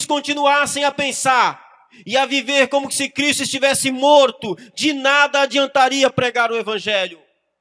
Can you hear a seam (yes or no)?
no